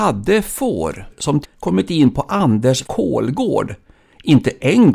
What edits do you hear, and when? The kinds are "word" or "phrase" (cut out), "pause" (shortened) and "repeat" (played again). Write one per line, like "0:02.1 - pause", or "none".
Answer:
0:01.4 - phrase
0:02.8 - word